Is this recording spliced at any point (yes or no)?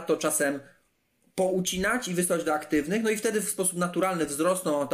no